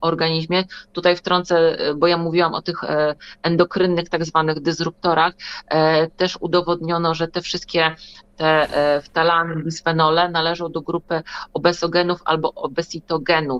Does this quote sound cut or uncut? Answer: uncut